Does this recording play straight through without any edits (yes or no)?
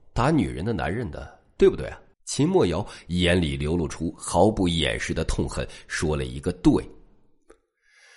no